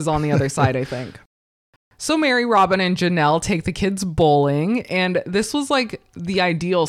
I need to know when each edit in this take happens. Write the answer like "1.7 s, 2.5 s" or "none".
none